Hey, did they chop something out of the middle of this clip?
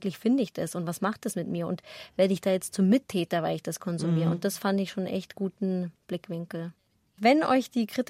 no; 0 cuts

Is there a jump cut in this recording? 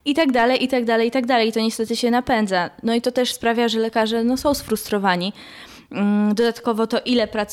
no; 0 cuts

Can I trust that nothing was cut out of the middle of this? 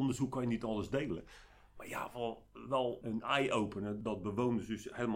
yes; 0 cuts

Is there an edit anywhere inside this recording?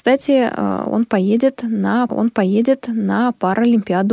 yes; 1 cut; at 2.1 s

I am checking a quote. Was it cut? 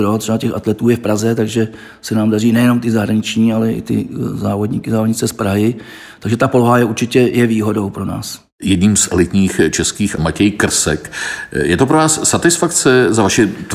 yes; 1 cut; at 10.2 s

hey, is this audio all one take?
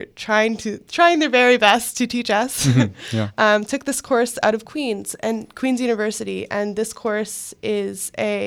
yes; 0 cuts

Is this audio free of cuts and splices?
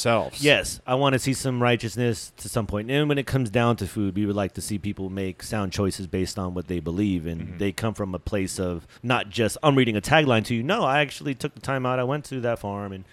no; 1 cut; at 9.0 s

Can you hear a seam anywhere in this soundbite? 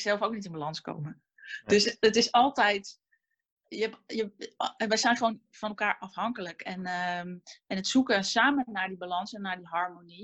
no; 0 cuts

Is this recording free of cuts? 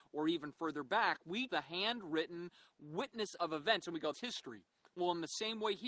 no; 3 cuts; at 1.5 s, 3.4 s, 4.1 s

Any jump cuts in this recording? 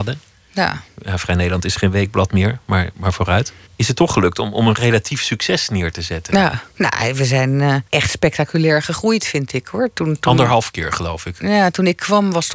yes; 3 cuts; at 3.7 s, 6.7 s, 7.9 s

